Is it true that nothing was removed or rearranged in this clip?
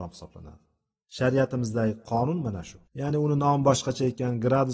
no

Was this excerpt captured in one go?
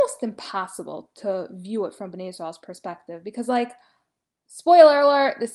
yes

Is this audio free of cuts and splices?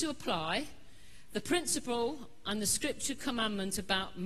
yes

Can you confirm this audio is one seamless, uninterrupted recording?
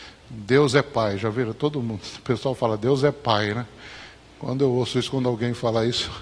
yes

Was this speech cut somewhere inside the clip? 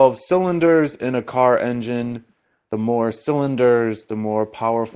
no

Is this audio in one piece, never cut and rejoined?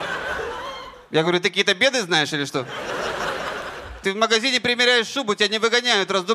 yes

